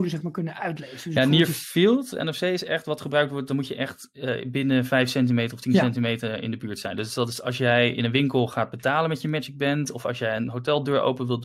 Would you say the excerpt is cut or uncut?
uncut